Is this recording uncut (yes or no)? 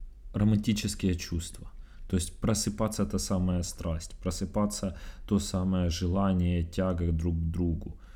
yes